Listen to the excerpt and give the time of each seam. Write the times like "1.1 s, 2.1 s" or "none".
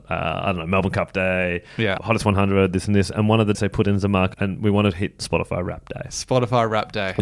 3.5 s, 4.3 s, 5.2 s